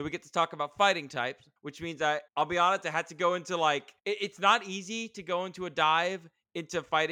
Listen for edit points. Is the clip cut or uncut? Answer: cut